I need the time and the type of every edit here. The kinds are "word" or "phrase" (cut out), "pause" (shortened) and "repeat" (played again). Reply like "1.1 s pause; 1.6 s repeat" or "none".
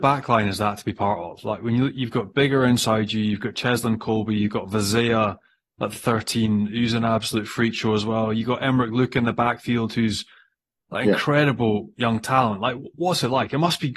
none